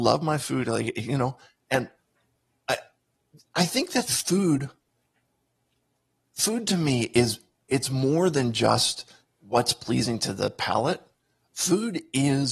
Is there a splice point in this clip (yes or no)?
no